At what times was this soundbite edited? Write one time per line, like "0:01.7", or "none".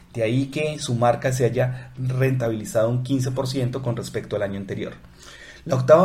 none